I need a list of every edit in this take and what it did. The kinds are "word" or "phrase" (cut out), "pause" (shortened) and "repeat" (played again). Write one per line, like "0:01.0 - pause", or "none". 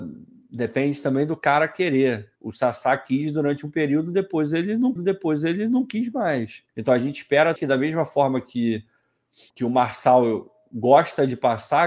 0:02.4 - pause
0:05.0 - repeat
0:06.7 - pause
0:07.6 - word
0:09.5 - pause